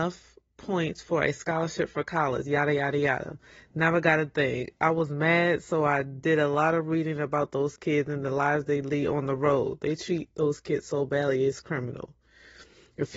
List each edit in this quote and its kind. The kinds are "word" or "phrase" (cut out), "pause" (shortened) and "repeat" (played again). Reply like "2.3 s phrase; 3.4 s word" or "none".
none